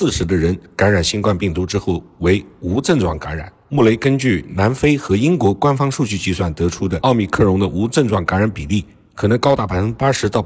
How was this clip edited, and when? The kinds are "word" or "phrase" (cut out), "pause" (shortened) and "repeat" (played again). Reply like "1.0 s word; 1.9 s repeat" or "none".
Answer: none